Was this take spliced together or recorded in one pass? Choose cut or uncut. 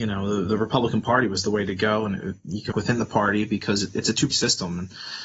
cut